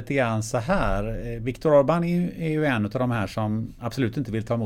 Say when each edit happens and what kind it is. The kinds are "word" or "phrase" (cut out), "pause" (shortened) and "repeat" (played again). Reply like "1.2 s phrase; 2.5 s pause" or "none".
none